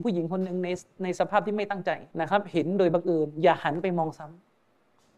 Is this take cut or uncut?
cut